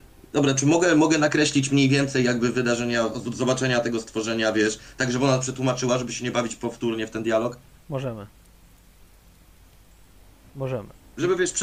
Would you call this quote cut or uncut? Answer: uncut